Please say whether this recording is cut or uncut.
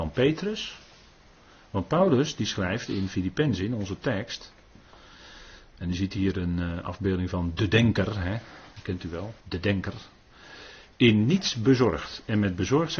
cut